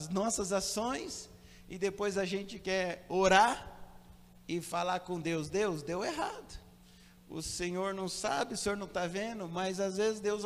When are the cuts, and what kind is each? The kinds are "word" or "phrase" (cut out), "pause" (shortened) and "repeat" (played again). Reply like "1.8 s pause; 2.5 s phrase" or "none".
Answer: none

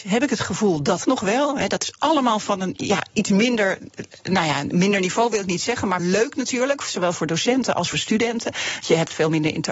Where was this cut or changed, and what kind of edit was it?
1.0 s word; 6.0 s word; 7.9 s word

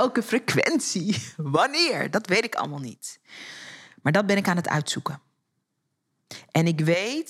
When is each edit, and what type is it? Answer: none

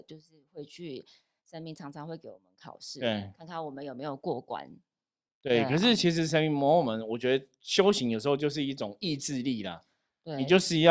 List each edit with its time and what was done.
none

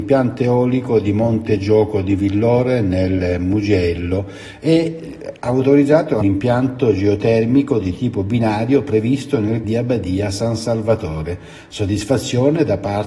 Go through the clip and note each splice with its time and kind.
6.2 s phrase; 9.6 s word

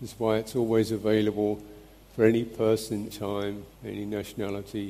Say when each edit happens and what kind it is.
2.0 s pause; 3.1 s phrase; 3.8 s pause

